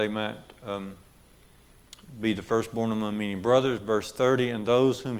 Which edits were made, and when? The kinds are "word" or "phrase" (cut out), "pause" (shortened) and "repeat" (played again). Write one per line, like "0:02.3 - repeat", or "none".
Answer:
none